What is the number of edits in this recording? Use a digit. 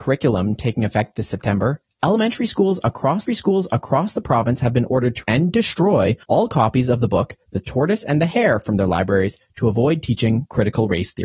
3